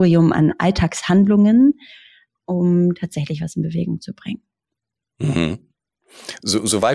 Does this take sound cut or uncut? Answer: uncut